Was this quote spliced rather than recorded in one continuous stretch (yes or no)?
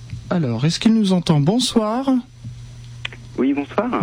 no